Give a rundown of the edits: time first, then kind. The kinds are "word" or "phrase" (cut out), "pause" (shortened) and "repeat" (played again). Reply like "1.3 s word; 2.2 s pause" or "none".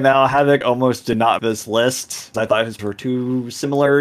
1.4 s word; 2.3 s word; 2.8 s word